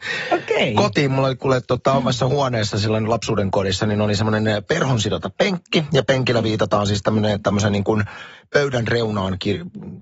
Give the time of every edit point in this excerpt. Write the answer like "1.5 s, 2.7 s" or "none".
none